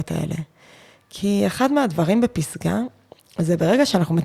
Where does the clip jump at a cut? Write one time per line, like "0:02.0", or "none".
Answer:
none